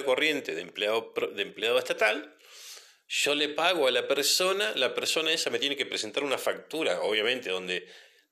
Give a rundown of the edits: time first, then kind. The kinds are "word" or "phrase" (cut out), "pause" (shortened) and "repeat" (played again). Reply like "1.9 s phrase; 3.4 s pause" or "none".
none